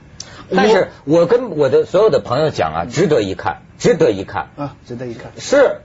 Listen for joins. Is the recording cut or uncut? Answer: cut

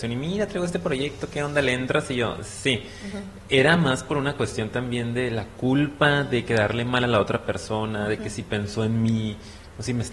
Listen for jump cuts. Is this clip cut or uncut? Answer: uncut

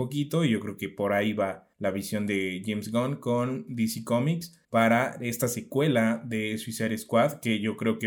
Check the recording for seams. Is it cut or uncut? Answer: cut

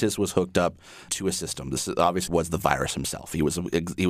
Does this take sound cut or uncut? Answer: cut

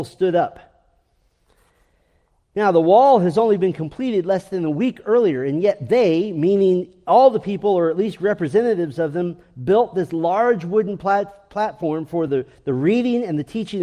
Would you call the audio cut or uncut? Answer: uncut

